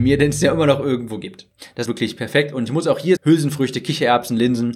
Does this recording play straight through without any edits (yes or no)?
no